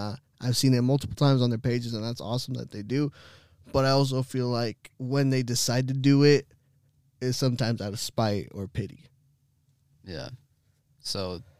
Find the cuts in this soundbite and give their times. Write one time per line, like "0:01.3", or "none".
0:04.9